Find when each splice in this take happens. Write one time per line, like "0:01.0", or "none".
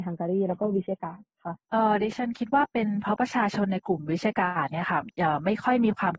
0:01.6